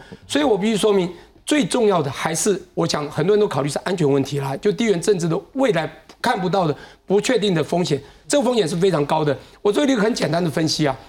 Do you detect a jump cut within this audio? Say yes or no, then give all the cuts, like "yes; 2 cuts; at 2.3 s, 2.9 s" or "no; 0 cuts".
no; 0 cuts